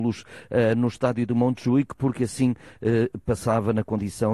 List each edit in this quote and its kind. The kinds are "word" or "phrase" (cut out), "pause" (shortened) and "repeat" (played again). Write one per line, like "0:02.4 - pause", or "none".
none